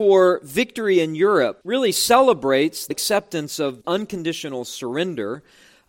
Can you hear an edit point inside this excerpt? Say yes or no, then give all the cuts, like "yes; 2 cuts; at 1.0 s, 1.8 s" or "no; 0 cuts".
yes; 3 cuts; at 1.6 s, 2.9 s, 3.8 s